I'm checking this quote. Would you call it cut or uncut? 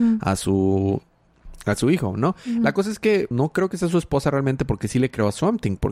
cut